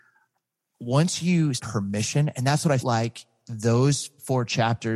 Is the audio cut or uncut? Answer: cut